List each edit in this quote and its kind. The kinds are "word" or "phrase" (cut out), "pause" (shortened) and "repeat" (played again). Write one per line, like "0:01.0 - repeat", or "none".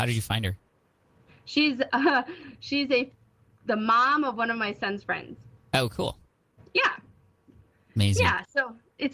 none